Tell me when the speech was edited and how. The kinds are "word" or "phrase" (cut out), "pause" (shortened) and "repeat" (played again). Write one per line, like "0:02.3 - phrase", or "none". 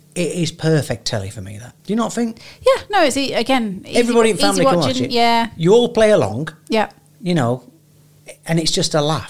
0:01.8 - pause